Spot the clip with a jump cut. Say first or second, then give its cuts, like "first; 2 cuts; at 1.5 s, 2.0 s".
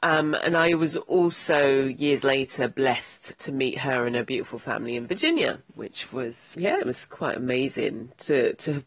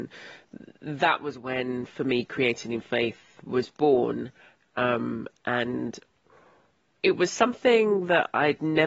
first; 2 cuts; at 5.7 s, 6.5 s